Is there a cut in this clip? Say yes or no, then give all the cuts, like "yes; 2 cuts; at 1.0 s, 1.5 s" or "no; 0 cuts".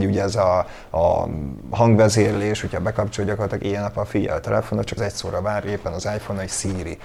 yes; 1 cut; at 5.0 s